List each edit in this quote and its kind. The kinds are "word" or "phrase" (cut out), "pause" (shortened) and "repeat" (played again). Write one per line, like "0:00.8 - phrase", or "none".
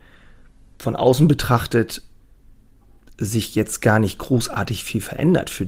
none

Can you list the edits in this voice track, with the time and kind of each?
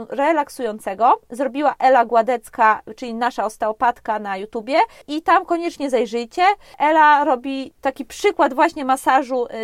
none

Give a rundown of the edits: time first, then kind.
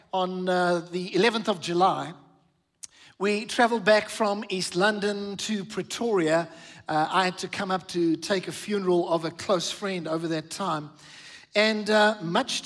none

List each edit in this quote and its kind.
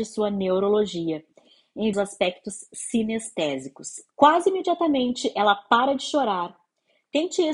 0:01.9 - phrase
0:04.1 - pause

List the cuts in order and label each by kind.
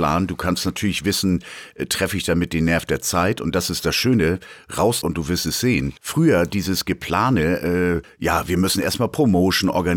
0:05.0 - word
0:06.0 - pause
0:08.0 - word

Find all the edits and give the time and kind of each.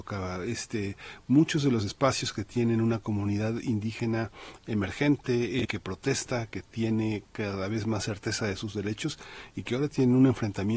0:05.6 - word

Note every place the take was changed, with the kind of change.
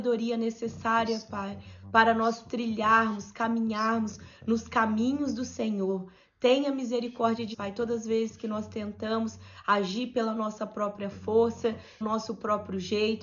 0:07.5 - word
0:12.0 - word

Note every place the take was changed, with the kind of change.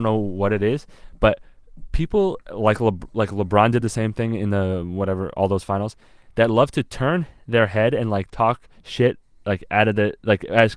none

